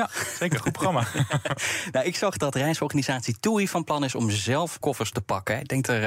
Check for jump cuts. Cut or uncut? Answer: cut